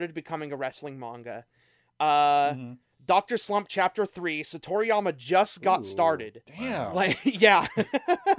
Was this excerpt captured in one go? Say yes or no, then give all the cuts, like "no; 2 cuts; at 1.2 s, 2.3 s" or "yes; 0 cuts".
yes; 0 cuts